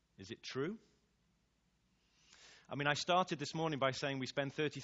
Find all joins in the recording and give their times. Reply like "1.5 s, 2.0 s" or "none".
none